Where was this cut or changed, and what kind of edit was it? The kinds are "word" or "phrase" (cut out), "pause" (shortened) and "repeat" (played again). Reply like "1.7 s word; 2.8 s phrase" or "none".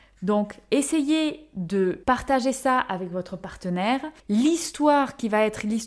2.0 s pause; 4.2 s pause